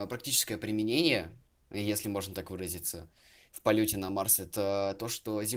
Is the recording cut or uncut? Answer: uncut